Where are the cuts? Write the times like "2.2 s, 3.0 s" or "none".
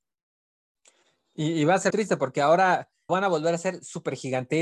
1.9 s, 3.1 s